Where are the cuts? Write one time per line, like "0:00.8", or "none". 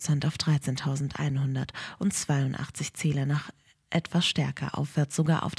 none